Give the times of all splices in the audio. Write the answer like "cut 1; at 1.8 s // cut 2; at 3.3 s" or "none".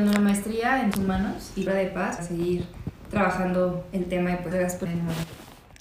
cut 1; at 0.9 s // cut 2; at 1.7 s // cut 3; at 2.2 s // cut 4; at 4.5 s // cut 5; at 4.9 s